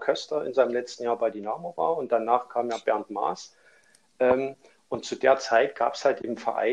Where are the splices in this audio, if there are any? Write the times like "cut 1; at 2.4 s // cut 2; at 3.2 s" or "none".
none